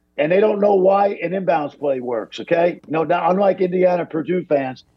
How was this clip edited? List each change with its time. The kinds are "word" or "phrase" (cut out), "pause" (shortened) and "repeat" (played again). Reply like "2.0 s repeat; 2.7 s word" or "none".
none